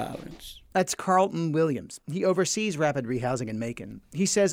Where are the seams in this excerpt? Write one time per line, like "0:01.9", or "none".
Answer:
none